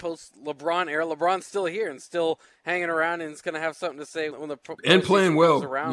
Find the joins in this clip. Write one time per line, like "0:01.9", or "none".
0:04.3

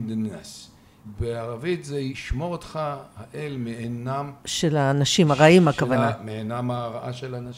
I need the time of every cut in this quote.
none

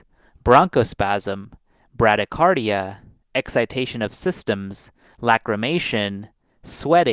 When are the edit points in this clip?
none

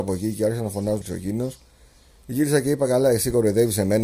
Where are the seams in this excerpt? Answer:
0:01.0

